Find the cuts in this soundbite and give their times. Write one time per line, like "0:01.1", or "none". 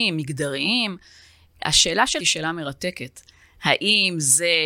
0:02.2